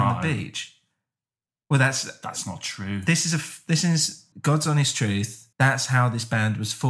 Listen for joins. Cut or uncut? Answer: cut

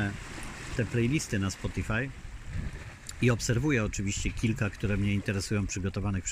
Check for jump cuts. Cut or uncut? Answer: uncut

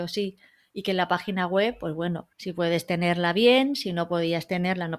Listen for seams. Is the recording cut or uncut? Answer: cut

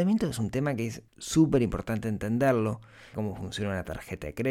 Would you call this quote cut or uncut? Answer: cut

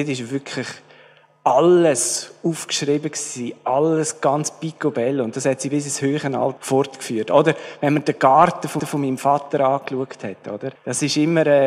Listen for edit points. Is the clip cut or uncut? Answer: cut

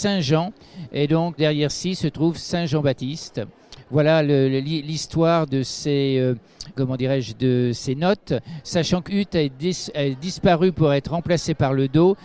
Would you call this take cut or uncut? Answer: cut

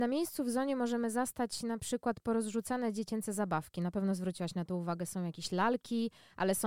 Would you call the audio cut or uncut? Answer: uncut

